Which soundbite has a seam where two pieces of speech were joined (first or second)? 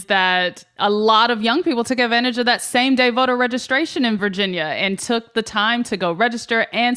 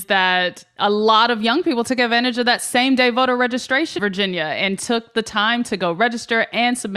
second